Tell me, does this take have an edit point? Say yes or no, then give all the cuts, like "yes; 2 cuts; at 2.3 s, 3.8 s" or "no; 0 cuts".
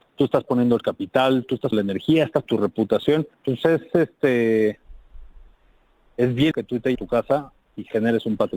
yes; 5 cuts; at 1.7 s, 2.4 s, 3.3 s, 6.5 s, 6.9 s